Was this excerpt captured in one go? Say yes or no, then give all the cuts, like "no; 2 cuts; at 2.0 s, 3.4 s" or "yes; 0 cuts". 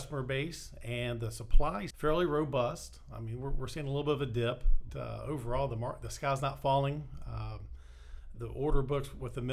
no; 3 cuts; at 1.9 s, 4.9 s, 8.3 s